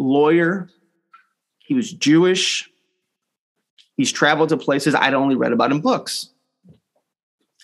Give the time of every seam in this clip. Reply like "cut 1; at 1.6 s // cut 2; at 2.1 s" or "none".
none